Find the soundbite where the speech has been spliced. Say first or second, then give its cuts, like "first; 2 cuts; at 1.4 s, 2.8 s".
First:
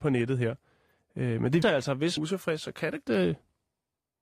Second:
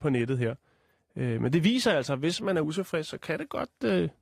first; 3 cuts; at 1.6 s, 2.2 s, 3.0 s